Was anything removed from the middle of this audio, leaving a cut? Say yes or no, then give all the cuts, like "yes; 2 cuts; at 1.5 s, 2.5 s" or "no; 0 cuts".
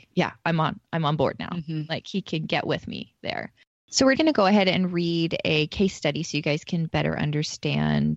yes; 1 cut; at 4.1 s